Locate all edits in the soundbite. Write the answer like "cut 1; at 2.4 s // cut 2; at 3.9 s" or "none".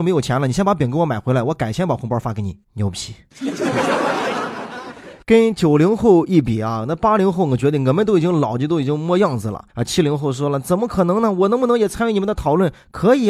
cut 1; at 2.6 s // cut 2; at 9.7 s